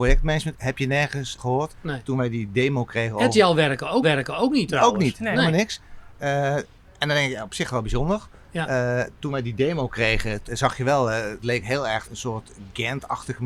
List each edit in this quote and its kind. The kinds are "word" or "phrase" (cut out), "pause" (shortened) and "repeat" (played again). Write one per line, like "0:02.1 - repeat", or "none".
0:01.4 - word
0:04.0 - repeat
0:06.9 - pause
0:10.4 - word
0:11.4 - word
0:12.0 - word